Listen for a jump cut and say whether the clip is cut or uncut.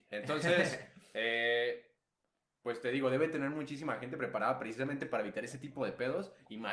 uncut